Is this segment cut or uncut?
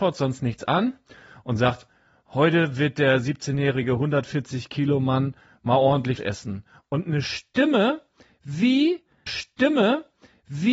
cut